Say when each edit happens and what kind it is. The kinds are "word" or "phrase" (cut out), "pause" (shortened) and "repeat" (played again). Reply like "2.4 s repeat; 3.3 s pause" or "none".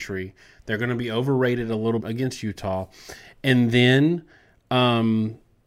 2.0 s phrase